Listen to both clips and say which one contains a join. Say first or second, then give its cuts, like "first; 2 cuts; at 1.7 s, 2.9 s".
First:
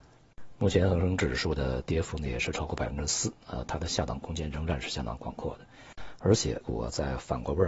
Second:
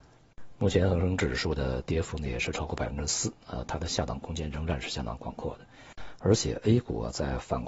first; 1 cut; at 6.6 s